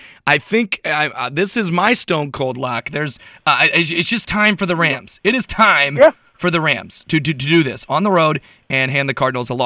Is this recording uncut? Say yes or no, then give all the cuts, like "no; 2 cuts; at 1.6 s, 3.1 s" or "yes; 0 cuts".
yes; 0 cuts